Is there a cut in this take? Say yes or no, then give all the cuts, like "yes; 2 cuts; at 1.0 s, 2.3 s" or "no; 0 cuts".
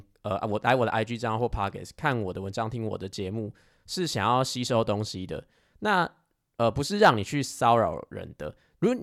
no; 0 cuts